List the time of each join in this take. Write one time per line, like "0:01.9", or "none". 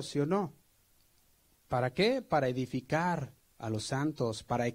0:03.4